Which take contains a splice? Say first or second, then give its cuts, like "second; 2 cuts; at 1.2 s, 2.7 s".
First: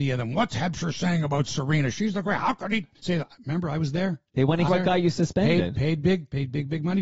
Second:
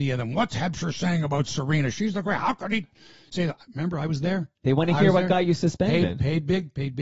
first; 2 cuts; at 3.0 s, 4.7 s